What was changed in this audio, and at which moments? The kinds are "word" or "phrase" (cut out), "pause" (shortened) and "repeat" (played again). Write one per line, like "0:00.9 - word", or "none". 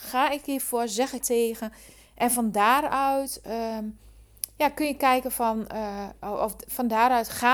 0:01.2 - phrase